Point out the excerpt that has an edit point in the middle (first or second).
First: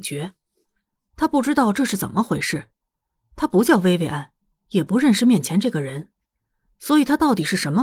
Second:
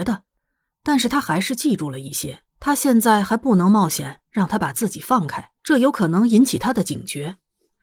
second